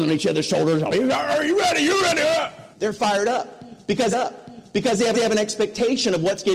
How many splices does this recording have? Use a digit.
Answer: 4